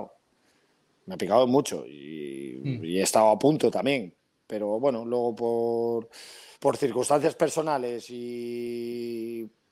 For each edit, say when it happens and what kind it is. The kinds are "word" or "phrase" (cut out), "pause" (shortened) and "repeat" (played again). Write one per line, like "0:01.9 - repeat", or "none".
0:06.5 - pause